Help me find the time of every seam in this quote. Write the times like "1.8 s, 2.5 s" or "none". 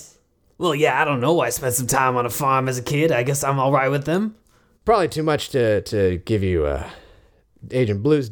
none